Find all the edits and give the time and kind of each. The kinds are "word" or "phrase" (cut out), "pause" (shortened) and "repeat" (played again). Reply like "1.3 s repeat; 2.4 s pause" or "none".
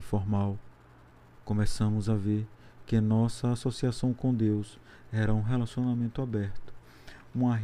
none